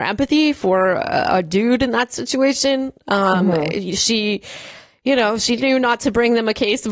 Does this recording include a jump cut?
no; 0 cuts

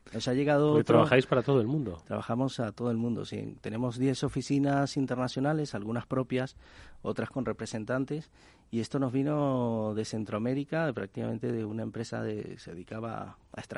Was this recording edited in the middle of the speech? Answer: no; 0 cuts

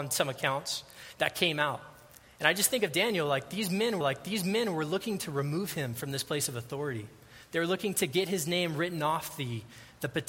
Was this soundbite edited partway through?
yes; 1 cut; at 4.0 s

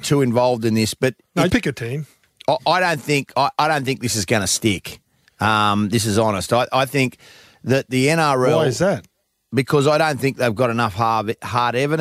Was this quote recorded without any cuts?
no; 1 cut; at 1.5 s

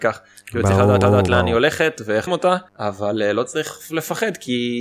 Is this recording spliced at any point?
yes; 3 cuts; at 1.0 s, 2.3 s, 2.7 s

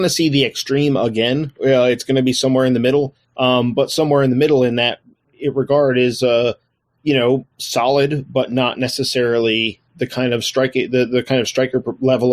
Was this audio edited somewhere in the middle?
yes; 2 cuts; at 3.2 s, 7.5 s

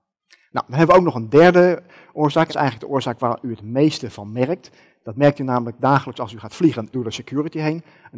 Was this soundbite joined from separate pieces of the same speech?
yes; 2 cuts; at 2.5 s, 6.9 s

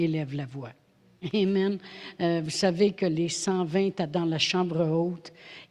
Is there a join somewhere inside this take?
no; 0 cuts

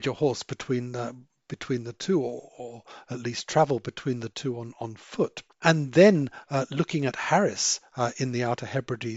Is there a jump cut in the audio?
no; 0 cuts

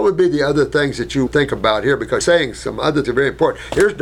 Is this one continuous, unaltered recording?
no; 3 cuts; at 1.3 s, 2.2 s, 3.0 s

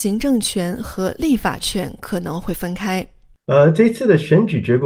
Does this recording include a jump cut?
no; 0 cuts

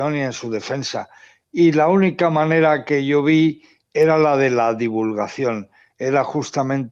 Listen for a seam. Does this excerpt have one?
no; 0 cuts

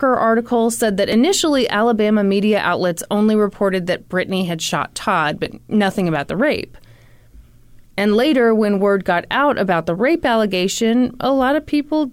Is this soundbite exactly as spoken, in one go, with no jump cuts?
yes; 0 cuts

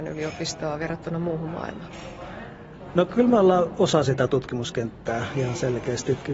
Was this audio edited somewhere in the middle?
no; 0 cuts

